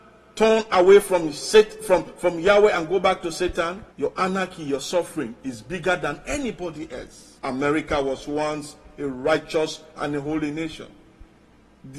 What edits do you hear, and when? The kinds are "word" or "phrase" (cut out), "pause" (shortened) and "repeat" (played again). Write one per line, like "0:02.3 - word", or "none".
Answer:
0:03.9 - pause
0:07.4 - pause